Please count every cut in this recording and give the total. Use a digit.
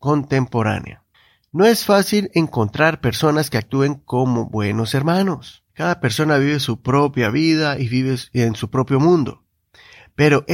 2